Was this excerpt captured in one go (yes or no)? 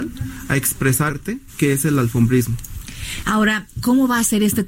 no